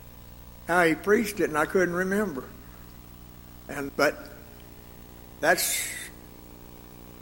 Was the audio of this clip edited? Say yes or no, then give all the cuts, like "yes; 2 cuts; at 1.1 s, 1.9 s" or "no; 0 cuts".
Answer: yes; 1 cut; at 3.9 s